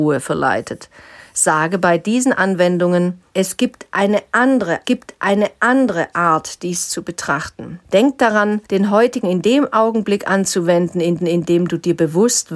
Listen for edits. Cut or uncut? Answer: cut